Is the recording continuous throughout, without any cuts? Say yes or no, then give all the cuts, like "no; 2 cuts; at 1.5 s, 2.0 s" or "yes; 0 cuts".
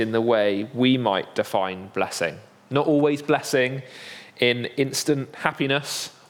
yes; 0 cuts